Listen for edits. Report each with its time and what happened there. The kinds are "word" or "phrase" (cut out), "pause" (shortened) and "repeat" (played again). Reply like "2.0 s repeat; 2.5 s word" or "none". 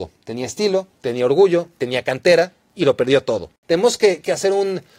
3.6 s pause